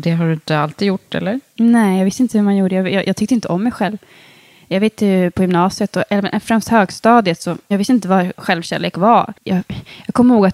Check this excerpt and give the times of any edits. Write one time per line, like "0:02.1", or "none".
0:09.4